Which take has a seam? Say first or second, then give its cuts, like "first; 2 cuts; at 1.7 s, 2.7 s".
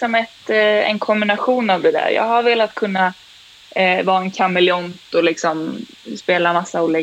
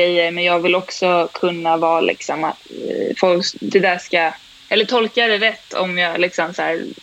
second; 2 cuts; at 2.6 s, 4.5 s